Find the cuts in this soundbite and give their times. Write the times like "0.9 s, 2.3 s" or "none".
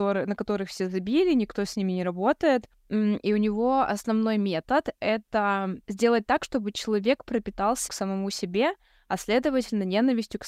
2.7 s, 5.8 s, 7.9 s